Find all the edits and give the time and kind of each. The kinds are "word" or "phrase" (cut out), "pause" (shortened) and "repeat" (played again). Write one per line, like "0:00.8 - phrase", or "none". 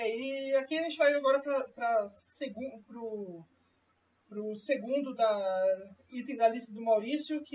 none